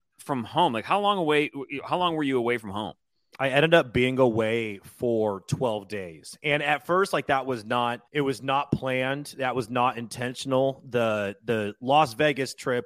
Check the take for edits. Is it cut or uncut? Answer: cut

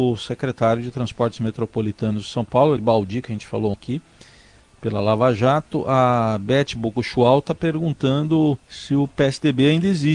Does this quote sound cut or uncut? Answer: cut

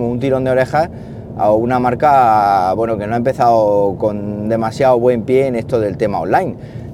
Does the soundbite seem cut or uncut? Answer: uncut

